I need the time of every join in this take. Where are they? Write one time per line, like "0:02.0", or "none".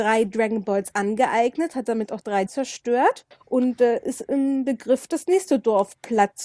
0:02.5
0:03.3